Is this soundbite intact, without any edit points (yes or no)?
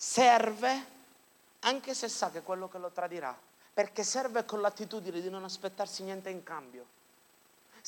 no